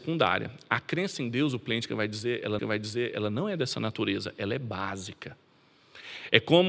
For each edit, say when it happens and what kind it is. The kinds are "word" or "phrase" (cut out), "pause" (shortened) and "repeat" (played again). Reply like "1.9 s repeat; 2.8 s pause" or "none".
2.6 s repeat